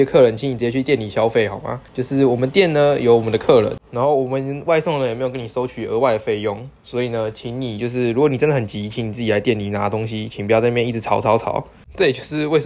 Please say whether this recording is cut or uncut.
cut